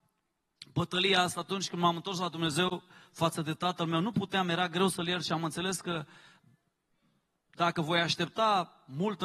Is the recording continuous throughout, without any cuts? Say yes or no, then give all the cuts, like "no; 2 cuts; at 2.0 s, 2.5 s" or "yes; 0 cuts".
yes; 0 cuts